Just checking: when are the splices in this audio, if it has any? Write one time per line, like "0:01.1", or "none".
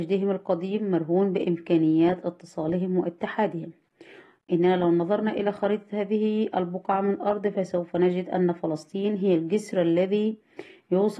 none